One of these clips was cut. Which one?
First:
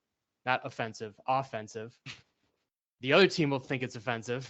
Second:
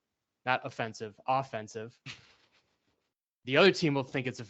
first; 1 cut; at 2.2 s

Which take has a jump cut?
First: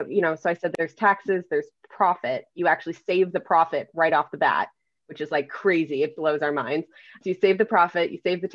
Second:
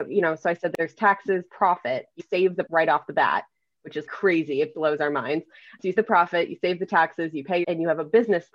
second; 6 cuts; at 1.5 s, 2.2 s, 2.7 s, 4.1 s, 6.0 s, 7.6 s

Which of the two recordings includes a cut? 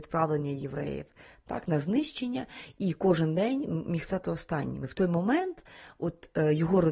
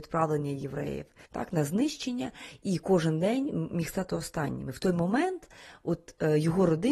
second; 1 cut; at 1.2 s

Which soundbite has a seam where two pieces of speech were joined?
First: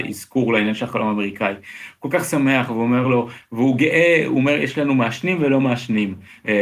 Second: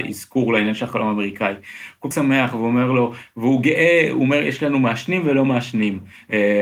second; 1 cut; at 2.1 s

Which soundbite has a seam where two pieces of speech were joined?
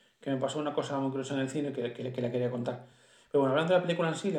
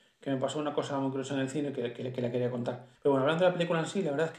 second; 1 cut; at 2.9 s

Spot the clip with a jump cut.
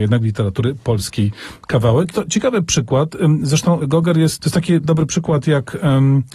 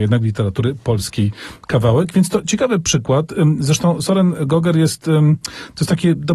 first; 4 cuts; at 2.1 s, 3.8 s, 4.4 s, 4.8 s

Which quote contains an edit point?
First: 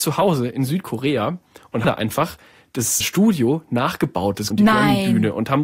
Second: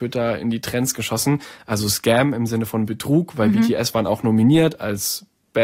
first; 3 cuts; at 1.8 s, 3.0 s, 4.5 s

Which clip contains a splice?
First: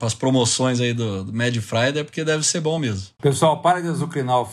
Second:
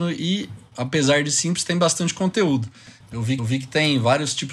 second; 1 cut; at 3.4 s

